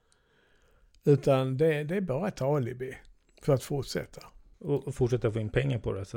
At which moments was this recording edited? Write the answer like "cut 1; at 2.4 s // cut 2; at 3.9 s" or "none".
none